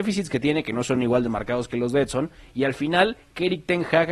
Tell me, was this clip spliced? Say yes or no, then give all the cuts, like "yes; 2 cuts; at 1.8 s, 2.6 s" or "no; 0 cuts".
no; 0 cuts